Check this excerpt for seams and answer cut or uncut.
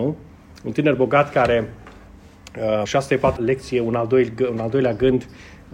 cut